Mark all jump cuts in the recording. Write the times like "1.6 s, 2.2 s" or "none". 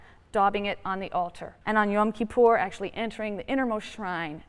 1.6 s

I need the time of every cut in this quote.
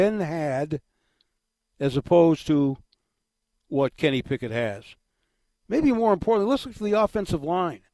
none

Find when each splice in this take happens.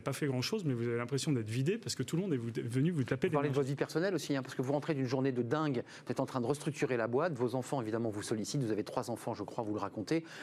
none

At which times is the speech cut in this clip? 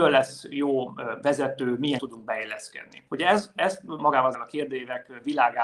1.2 s, 2.0 s, 3.1 s, 4.0 s, 4.3 s

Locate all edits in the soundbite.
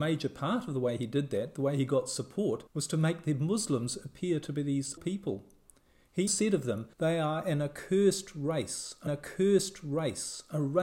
2.7 s, 5.0 s, 6.3 s, 6.9 s, 9.1 s

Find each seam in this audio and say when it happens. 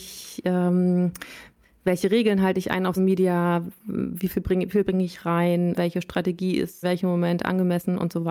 3.0 s, 4.8 s, 5.7 s, 6.8 s

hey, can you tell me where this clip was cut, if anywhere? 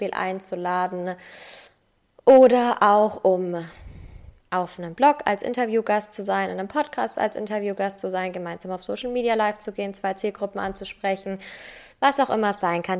none

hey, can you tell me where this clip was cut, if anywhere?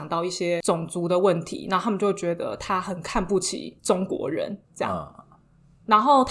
3.8 s, 4.6 s

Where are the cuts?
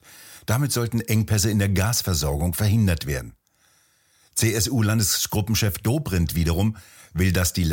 none

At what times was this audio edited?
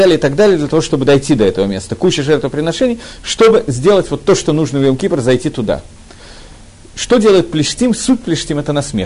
none

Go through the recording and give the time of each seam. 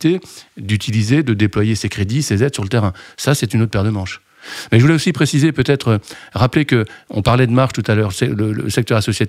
none

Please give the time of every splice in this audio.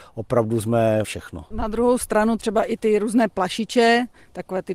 1.0 s, 2.4 s

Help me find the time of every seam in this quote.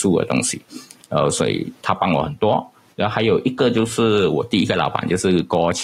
none

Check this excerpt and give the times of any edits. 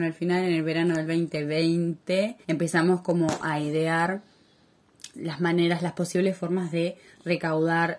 2.4 s, 5.1 s

